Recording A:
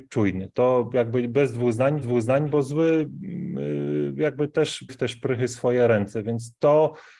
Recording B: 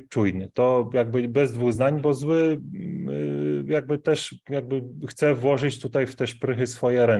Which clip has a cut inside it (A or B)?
A